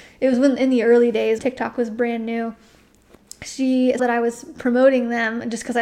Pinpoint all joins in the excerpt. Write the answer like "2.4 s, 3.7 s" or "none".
1.4 s, 4.0 s

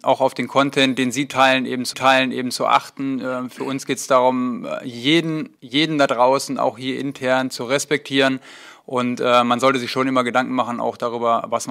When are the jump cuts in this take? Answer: 1.9 s, 5.6 s

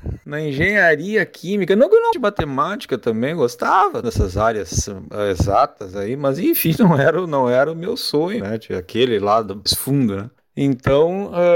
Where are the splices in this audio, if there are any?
2.1 s, 4.0 s, 8.4 s, 9.7 s

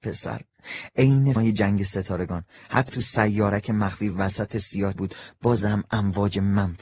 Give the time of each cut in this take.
1.4 s, 2.9 s, 4.9 s

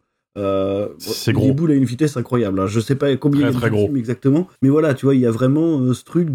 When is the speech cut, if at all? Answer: 4.6 s

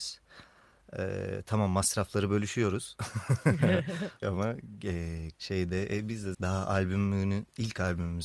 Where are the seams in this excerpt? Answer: 4.2 s, 5.3 s, 6.3 s

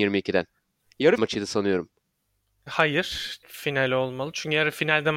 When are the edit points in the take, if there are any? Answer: 1.2 s, 3.4 s

